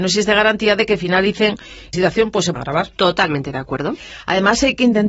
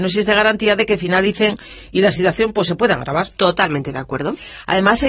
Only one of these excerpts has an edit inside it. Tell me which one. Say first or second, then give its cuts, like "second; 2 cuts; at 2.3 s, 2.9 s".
first; 2 cuts; at 1.9 s, 2.5 s